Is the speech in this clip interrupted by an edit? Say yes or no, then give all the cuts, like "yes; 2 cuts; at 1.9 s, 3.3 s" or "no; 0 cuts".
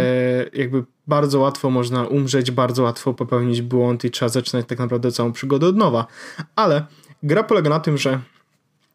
no; 0 cuts